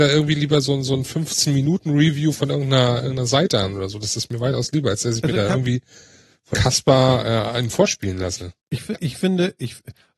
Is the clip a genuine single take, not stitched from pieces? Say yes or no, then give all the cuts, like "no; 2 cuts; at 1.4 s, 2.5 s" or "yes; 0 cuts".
no; 2 cuts; at 6.5 s, 8.6 s